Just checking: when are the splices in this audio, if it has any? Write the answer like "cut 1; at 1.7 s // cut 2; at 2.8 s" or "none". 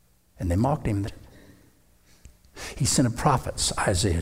cut 1; at 1.0 s